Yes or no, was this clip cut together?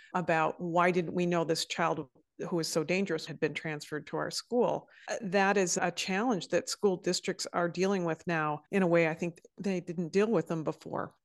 yes